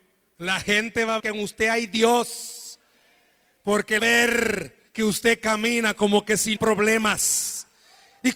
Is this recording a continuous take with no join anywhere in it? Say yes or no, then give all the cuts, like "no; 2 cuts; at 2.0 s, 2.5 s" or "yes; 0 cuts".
no; 4 cuts; at 1.2 s, 4.0 s, 4.9 s, 6.6 s